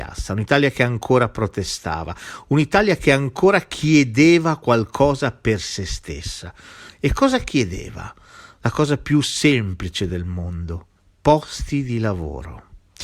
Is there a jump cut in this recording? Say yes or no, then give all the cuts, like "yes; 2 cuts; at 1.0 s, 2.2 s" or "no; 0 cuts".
no; 0 cuts